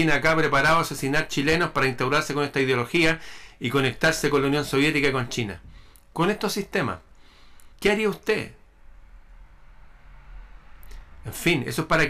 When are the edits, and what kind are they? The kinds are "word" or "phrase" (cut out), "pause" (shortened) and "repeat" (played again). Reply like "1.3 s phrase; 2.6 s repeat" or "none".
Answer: 7.7 s pause